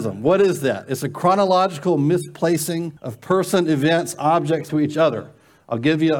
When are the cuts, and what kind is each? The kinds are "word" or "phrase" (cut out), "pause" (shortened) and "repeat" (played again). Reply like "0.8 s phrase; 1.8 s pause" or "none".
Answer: 3.0 s pause; 4.7 s phrase